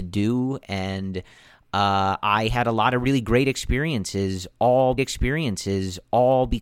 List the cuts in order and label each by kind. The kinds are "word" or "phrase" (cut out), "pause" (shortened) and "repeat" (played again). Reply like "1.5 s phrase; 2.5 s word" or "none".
5.0 s repeat